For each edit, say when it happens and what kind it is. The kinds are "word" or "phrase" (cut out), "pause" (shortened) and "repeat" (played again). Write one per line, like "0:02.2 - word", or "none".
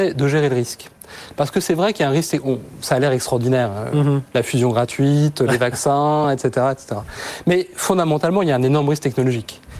none